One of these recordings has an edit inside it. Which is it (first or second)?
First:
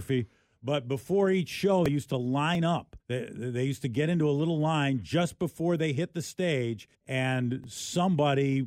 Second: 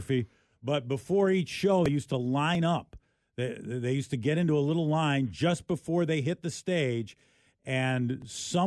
first